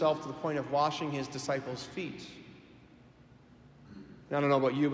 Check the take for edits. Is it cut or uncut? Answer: uncut